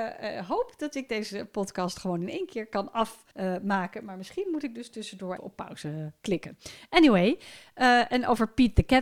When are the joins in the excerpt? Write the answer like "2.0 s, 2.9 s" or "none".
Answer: 3.3 s, 5.4 s